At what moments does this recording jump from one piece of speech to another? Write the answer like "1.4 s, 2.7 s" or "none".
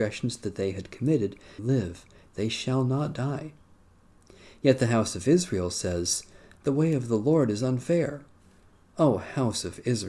1.6 s